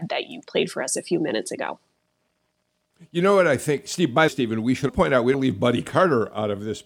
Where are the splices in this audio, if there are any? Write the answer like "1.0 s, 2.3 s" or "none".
4.3 s, 4.9 s, 5.3 s